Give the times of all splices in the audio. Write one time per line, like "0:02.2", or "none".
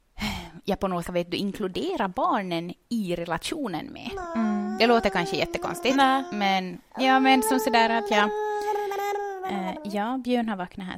0:01.0
0:06.9